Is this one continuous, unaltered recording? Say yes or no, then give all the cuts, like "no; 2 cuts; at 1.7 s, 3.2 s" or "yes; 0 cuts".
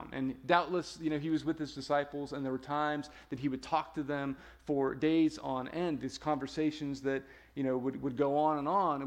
yes; 0 cuts